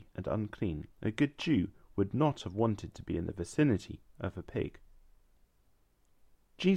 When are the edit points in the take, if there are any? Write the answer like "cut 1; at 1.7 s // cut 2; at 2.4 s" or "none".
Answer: cut 1; at 0.9 s